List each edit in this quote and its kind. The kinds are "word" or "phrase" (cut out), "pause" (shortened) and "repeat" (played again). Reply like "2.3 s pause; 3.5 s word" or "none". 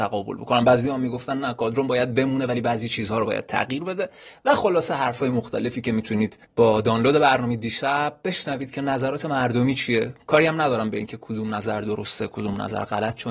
6.4 s pause